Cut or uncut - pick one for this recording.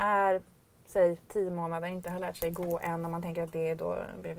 uncut